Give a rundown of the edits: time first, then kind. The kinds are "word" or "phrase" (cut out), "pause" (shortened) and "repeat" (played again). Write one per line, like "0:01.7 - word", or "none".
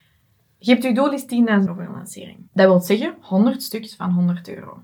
0:01.7 - word
0:02.5 - pause